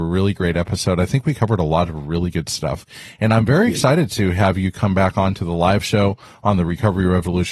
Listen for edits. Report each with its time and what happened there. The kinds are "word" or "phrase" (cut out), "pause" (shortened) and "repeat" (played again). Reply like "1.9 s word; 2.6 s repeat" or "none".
none